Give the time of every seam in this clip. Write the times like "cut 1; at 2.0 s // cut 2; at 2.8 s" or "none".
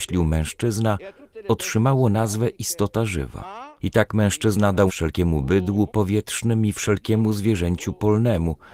cut 1; at 3.8 s // cut 2; at 4.9 s // cut 3; at 5.9 s